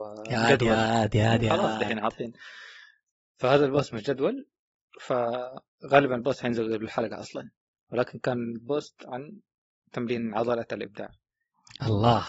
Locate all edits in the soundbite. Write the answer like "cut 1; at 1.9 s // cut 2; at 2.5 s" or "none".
none